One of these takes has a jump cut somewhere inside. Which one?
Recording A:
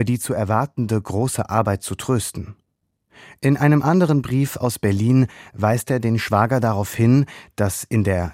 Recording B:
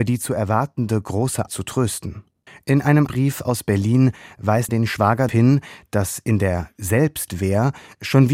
B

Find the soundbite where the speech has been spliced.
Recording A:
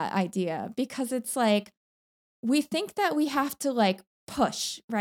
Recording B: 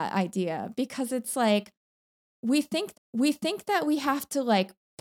B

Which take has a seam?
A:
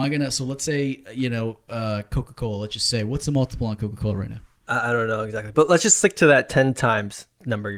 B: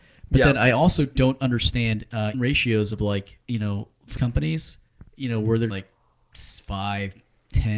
B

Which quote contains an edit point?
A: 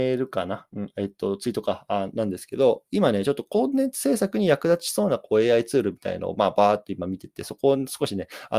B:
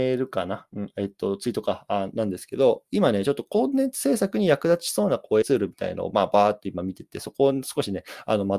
B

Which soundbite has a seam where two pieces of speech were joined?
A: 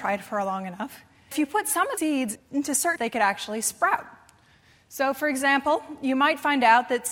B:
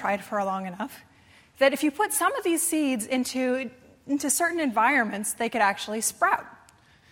A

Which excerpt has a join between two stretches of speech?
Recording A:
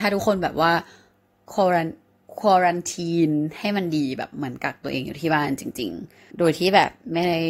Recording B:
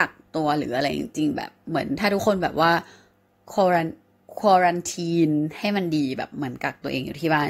A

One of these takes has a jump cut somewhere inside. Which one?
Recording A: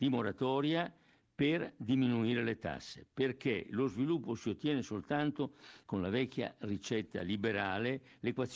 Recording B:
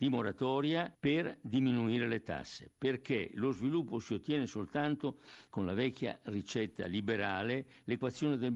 B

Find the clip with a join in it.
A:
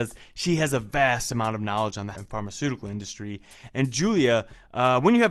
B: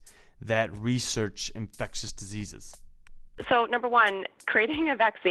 A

